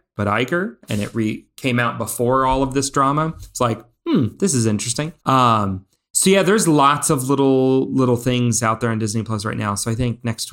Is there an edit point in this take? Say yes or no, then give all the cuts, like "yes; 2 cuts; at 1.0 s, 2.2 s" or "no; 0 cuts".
yes; 1 cut; at 5.2 s